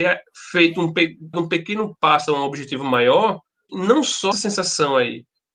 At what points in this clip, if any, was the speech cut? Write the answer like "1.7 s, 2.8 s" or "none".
1.3 s, 2.3 s, 3.7 s, 4.3 s

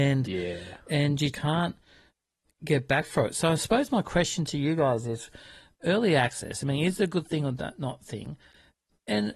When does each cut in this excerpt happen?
1.3 s

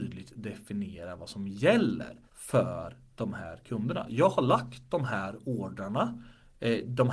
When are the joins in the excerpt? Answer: 2.3 s

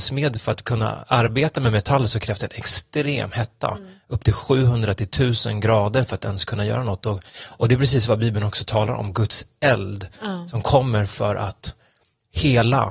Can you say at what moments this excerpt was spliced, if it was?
7.3 s

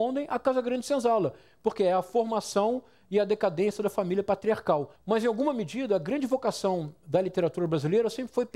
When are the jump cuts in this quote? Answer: none

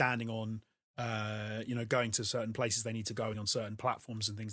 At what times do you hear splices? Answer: 3.3 s

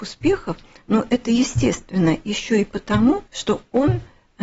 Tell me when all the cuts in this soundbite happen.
3.3 s

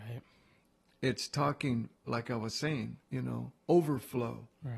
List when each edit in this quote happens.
2.0 s, 3.0 s

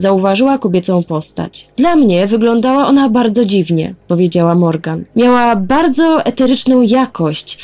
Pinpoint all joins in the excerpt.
4.0 s

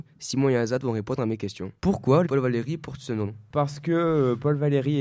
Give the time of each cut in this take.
1.8 s, 2.3 s

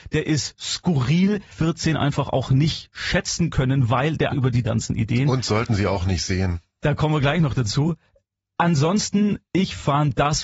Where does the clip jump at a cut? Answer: 1.5 s, 4.3 s, 4.6 s

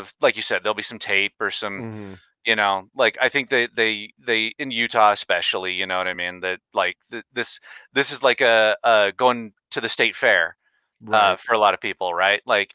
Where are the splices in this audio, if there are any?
none

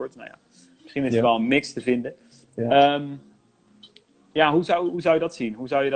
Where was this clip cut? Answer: none

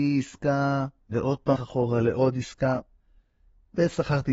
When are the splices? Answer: 1.0 s, 1.6 s

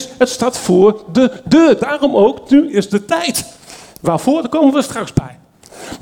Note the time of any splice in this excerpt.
none

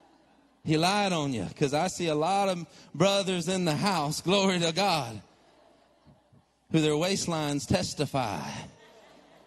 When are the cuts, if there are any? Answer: none

